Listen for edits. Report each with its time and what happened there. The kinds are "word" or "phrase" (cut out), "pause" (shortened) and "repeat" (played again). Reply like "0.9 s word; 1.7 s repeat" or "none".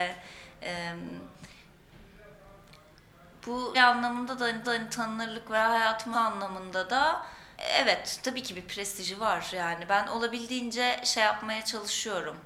3.7 s word; 4.6 s repeat; 6.1 s word; 7.5 s pause